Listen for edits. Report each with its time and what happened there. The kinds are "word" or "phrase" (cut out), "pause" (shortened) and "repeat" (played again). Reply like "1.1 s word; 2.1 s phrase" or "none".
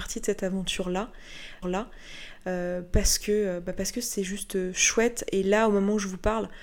1.6 s repeat